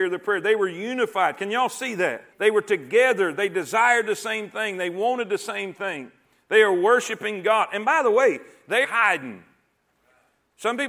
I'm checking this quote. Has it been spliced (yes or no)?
yes